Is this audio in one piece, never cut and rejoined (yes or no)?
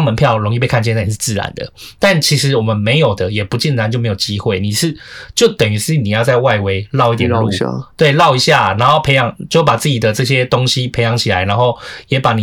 yes